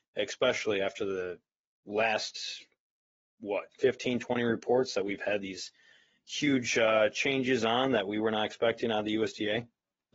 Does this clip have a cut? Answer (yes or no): no